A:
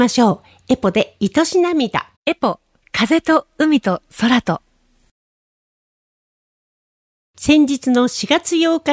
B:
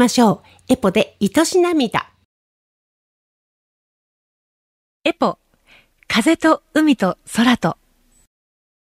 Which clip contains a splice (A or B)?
A